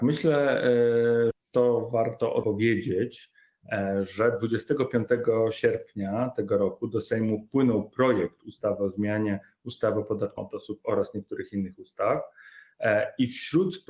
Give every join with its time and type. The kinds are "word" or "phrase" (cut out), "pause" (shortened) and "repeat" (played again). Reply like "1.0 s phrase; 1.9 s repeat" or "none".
1.3 s word; 2.4 s word; 10.4 s word; 10.8 s word